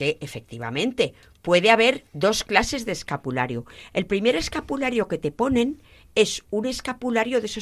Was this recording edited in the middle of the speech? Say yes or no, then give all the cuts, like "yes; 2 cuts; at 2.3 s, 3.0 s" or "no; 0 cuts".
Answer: no; 0 cuts